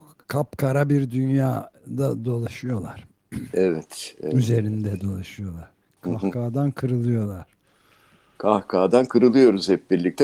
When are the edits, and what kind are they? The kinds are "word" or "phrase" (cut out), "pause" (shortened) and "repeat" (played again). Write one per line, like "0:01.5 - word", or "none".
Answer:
none